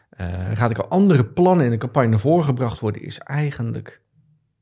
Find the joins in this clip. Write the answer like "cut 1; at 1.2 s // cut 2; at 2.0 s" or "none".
none